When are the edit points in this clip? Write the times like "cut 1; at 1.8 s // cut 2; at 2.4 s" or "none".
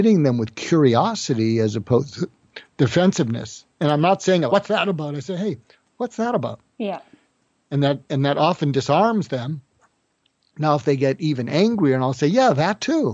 cut 1; at 4.5 s